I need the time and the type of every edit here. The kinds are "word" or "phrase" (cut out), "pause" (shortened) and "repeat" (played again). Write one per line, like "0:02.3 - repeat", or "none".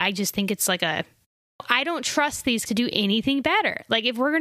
0:02.7 - word